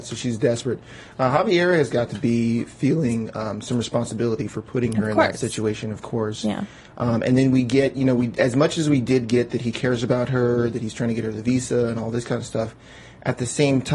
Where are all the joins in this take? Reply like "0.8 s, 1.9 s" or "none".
none